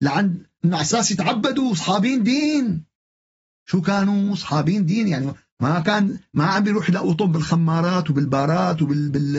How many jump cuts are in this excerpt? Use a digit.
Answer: 0